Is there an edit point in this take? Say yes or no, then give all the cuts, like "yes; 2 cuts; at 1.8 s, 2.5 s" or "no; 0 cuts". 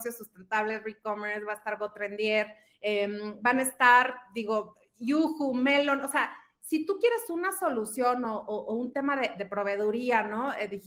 no; 0 cuts